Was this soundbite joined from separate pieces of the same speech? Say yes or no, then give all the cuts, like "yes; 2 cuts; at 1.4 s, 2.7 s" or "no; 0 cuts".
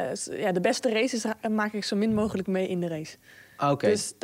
no; 0 cuts